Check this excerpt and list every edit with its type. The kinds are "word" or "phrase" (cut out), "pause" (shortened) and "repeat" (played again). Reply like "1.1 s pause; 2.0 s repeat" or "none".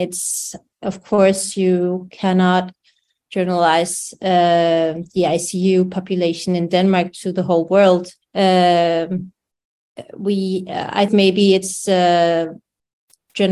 8.2 s pause; 11.1 s word